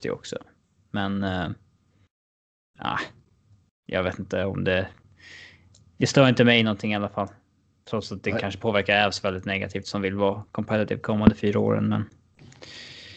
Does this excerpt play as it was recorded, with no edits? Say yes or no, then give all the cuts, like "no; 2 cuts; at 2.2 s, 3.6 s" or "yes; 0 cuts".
yes; 0 cuts